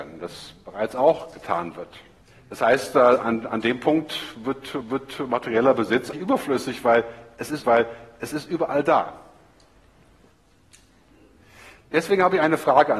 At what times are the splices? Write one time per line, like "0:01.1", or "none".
0:02.2
0:04.8
0:06.1
0:07.6